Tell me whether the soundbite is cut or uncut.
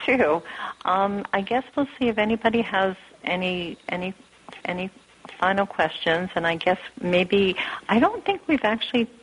cut